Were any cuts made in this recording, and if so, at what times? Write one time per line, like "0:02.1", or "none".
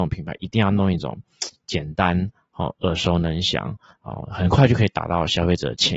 none